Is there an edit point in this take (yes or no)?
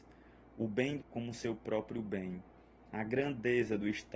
yes